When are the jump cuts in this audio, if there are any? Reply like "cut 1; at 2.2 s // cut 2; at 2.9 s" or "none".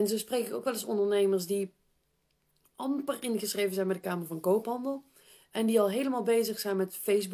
none